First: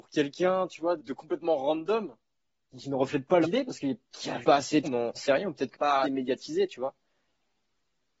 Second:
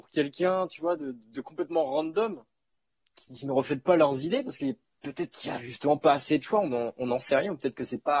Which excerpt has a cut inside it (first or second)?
first